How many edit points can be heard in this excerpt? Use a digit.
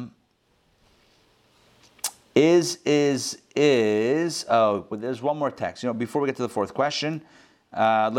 0